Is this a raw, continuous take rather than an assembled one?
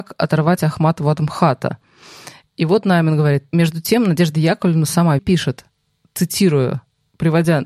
no; 1 cut; at 5.2 s

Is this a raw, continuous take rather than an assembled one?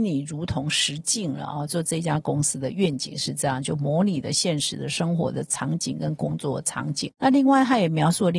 yes; 0 cuts

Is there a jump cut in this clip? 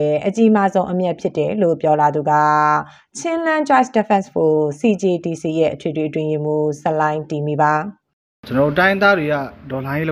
no; 0 cuts

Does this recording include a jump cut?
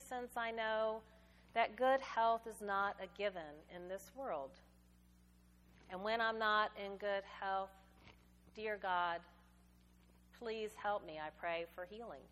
no; 0 cuts

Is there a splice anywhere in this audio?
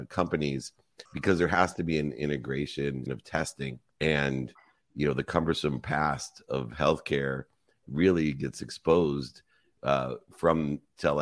yes; 3 cuts; at 1.1 s, 3.1 s, 3.9 s

